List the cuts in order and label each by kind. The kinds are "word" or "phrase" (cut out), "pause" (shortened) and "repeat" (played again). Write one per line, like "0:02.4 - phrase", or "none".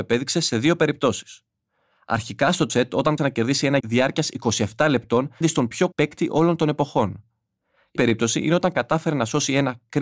0:02.7 - word
0:03.2 - word
0:03.8 - word
0:05.4 - word
0:05.9 - word
0:08.0 - word